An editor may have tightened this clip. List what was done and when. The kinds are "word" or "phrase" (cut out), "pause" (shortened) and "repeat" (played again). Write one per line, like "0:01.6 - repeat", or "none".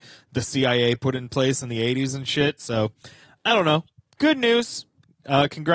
none